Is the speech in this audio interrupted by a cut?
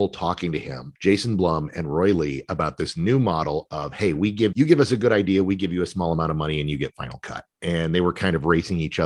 yes; 2 cuts; at 1.0 s, 4.5 s

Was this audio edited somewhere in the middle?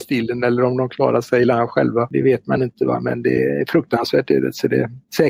no; 0 cuts

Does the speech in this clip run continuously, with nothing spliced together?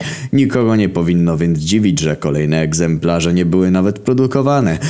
yes; 0 cuts

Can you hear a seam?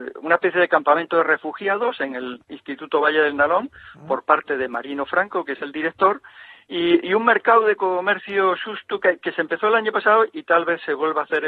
no; 0 cuts

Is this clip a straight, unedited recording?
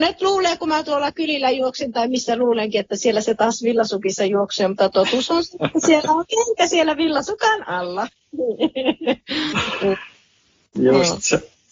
yes; 0 cuts

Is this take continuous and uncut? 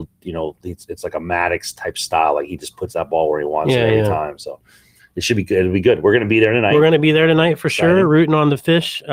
yes; 0 cuts

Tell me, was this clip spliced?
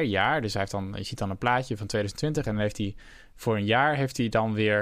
no; 0 cuts

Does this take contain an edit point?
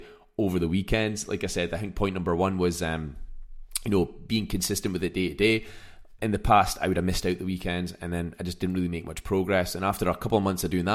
no; 0 cuts

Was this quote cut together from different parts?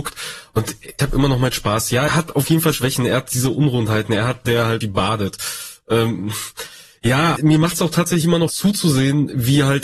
yes; 7 cuts; at 1.0 s, 2.1 s, 2.7 s, 4.4 s, 4.8 s, 7.4 s, 8.5 s

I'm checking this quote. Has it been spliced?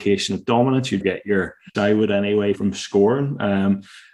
yes; 3 cuts; at 1.0 s, 1.7 s, 2.5 s

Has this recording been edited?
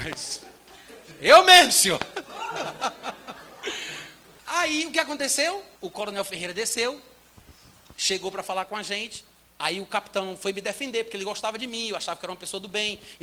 yes; 3 cuts; at 4.4 s, 5.8 s, 9.4 s

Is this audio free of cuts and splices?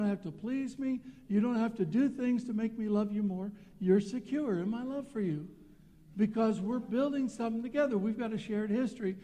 yes; 0 cuts

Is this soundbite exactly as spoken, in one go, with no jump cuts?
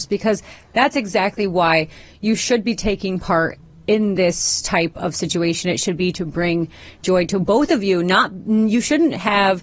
yes; 0 cuts

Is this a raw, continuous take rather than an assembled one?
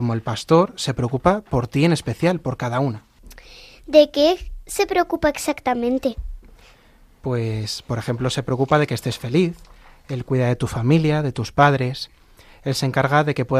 yes; 0 cuts

